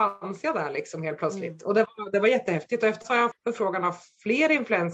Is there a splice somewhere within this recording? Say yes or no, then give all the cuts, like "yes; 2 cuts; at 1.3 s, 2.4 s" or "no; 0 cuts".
yes; 2 cuts; at 3.0 s, 3.3 s